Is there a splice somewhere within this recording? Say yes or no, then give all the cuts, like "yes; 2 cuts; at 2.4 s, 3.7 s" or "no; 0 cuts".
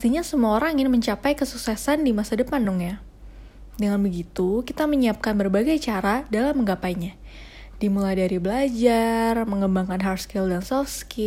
no; 0 cuts